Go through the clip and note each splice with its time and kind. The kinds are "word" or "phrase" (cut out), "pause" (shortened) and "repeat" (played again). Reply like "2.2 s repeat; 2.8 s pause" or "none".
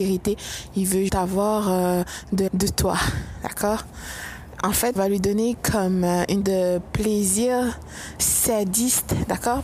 1.1 s word; 2.5 s word; 5.0 s word; 6.4 s word; 8.2 s word